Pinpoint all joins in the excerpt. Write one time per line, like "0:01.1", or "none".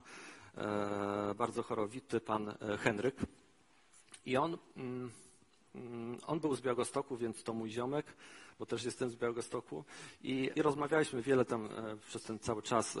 0:10.5